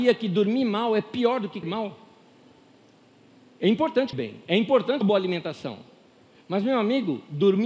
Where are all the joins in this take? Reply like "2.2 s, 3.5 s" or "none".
1.6 s, 4.1 s, 5.0 s